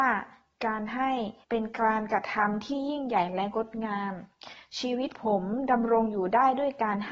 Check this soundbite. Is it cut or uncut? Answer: cut